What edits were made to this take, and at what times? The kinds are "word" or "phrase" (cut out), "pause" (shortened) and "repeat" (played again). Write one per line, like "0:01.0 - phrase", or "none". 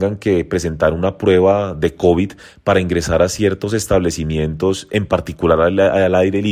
none